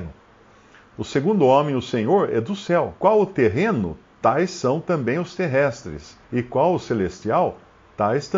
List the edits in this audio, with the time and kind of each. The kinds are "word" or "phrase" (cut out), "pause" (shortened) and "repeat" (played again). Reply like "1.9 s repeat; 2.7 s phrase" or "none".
3.0 s pause; 6.2 s pause